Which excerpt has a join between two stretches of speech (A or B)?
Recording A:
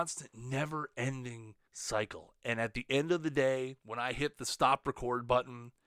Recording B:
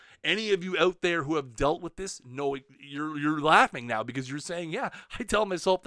A